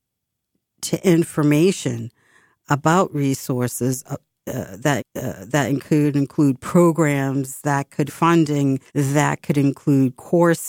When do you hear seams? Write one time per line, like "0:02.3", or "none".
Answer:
0:05.0
0:08.1
0:08.9

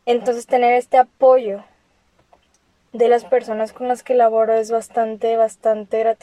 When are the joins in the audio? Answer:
none

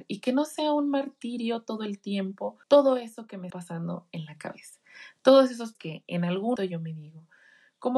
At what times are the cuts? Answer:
0:02.6
0:03.5
0:05.7
0:06.6

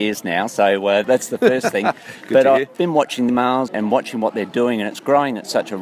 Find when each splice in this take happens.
0:01.0
0:02.8
0:03.3
0:03.7

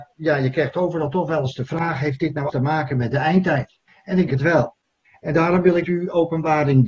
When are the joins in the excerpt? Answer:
0:02.5
0:03.9
0:04.3
0:05.1
0:05.8

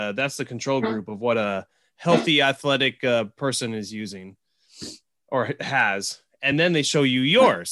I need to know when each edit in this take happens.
none

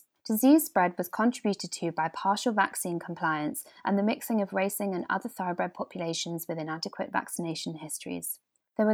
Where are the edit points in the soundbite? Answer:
none

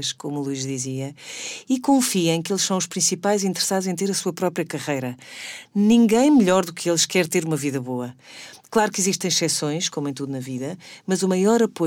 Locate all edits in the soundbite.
none

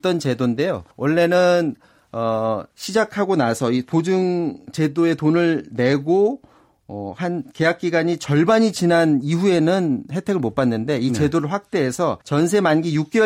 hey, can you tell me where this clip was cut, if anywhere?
0:00.9
0:02.7
0:12.2

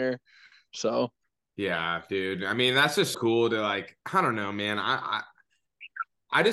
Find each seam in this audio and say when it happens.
0:01.2
0:03.1
0:04.0

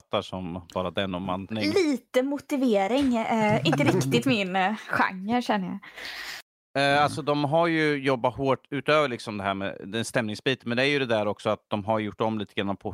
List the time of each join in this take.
0:01.5

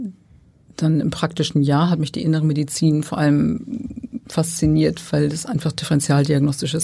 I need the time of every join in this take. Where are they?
none

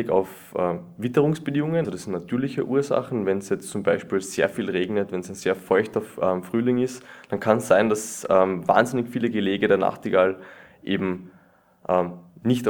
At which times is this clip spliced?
0:01.8

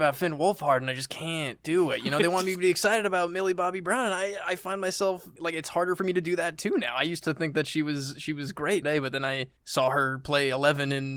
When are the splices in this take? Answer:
0:08.8

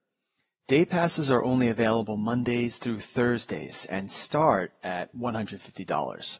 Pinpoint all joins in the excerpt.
none

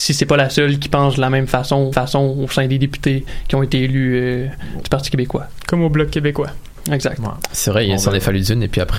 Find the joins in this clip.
0:01.9

